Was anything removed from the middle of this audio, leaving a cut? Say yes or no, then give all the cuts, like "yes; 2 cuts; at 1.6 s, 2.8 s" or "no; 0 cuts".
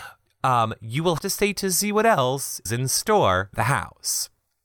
yes; 4 cuts; at 1.2 s, 1.6 s, 2.7 s, 3.5 s